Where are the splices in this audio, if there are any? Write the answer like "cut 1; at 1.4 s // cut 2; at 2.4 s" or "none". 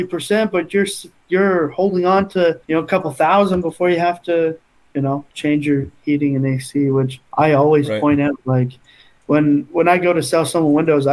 cut 1; at 2.6 s // cut 2; at 5.3 s // cut 3; at 7.3 s